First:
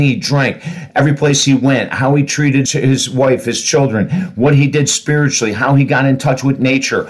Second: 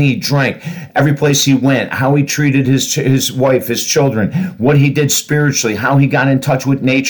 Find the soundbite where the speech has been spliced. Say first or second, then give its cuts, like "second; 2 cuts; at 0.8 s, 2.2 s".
first; 1 cut; at 2.7 s